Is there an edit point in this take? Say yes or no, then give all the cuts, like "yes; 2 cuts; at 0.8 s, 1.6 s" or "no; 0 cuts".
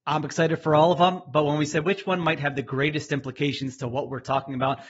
yes; 1 cut; at 1.8 s